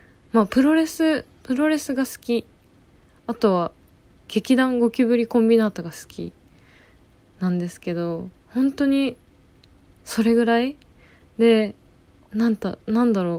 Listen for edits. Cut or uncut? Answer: uncut